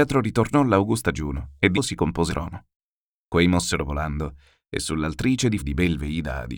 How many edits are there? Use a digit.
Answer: 3